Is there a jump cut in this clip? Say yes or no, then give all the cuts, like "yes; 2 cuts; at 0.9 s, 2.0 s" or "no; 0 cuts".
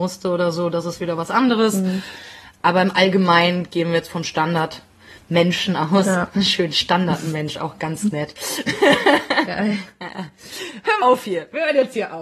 yes; 1 cut; at 11.0 s